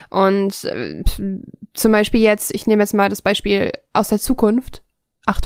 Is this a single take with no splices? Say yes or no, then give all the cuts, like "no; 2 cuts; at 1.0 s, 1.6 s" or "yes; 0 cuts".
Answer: yes; 0 cuts